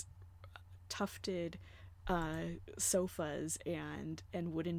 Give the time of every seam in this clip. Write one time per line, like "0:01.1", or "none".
none